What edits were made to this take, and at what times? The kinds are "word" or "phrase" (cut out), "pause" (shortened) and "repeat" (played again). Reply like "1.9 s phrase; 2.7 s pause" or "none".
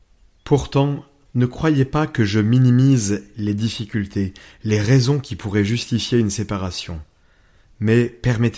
1.3 s pause